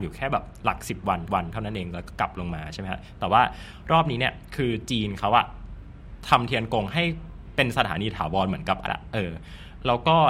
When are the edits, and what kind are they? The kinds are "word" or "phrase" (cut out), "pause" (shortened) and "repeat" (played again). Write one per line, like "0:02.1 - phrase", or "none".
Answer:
0:01.3 - repeat
0:08.9 - word